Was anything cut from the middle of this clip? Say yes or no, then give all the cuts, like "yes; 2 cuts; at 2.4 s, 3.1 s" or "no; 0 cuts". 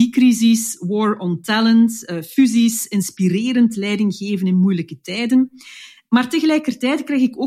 no; 0 cuts